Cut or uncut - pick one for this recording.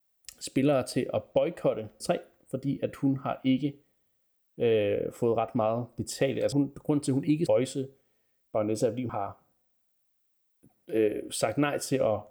cut